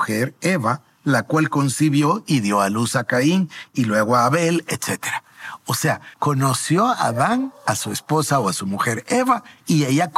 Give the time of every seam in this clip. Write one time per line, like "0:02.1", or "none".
0:06.1